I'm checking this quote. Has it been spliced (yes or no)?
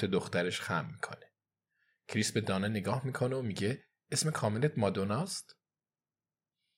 no